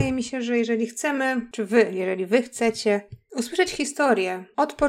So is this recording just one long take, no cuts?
yes; 0 cuts

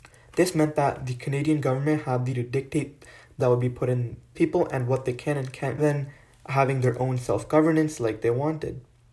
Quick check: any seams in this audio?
yes; 4 cuts; at 2.3 s, 3.4 s, 4.3 s, 5.8 s

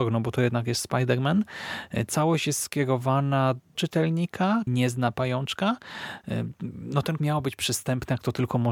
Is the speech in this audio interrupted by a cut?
yes; 3 cuts; at 3.7 s, 4.7 s, 7.2 s

